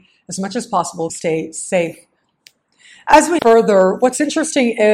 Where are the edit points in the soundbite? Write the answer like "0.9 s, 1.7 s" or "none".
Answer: 1.1 s, 3.4 s